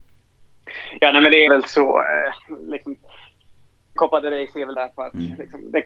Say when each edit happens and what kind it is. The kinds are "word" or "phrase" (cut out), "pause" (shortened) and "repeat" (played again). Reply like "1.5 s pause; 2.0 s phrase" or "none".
1.5 s word; 4.0 s word; 4.7 s word